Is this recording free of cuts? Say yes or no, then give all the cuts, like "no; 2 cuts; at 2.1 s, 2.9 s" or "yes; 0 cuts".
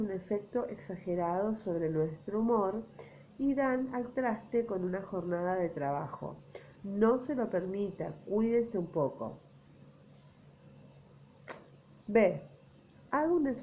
yes; 0 cuts